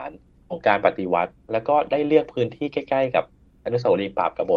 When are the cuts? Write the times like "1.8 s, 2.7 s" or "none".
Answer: none